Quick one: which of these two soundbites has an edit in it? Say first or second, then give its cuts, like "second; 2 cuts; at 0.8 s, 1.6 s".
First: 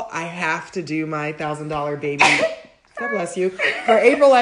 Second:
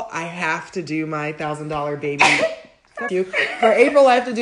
second; 1 cut; at 3.1 s